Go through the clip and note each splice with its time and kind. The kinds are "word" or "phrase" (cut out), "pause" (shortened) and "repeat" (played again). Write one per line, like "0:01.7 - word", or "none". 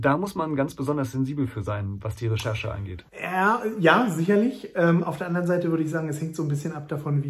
0:03.1 - pause